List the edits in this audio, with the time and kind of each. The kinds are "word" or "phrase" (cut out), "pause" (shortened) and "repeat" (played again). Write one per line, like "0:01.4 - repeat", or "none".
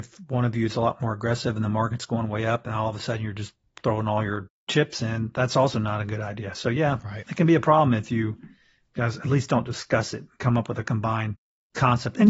none